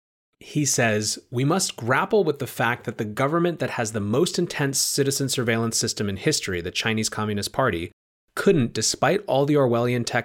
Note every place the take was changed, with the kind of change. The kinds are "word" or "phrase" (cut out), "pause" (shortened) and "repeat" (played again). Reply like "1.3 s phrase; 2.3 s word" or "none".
none